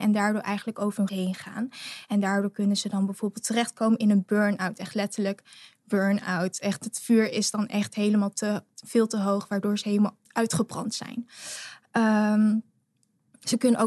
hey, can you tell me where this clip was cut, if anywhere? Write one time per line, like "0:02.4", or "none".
0:01.1
0:10.3